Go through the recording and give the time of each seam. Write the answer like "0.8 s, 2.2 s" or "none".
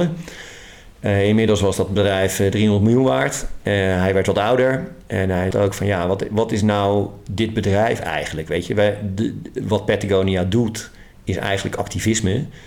5.5 s

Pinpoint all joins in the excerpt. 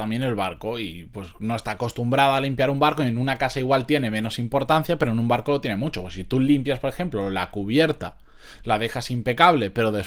none

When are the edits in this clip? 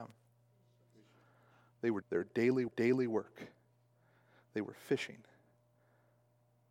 2.0 s, 2.7 s

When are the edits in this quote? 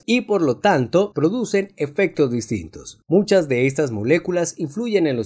none

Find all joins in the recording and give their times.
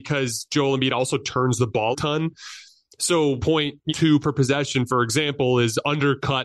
1.9 s, 3.4 s, 3.9 s, 4.2 s

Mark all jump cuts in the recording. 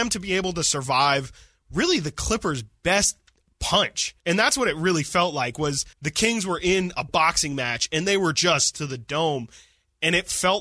4.2 s, 5.9 s, 8.7 s

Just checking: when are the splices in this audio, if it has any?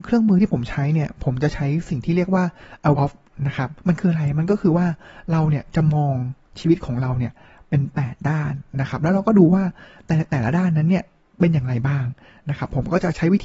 2.9 s, 3.3 s, 3.8 s

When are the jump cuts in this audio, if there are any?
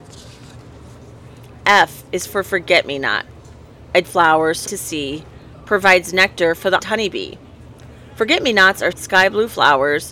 4.0 s, 4.7 s, 6.8 s, 8.9 s

